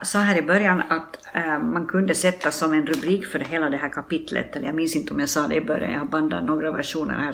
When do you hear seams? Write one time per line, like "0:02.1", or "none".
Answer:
none